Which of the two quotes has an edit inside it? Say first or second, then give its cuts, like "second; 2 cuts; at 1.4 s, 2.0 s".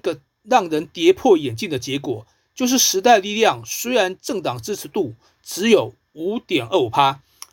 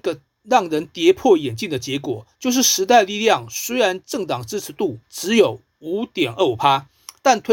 second; 2 cuts; at 2.3 s, 5.0 s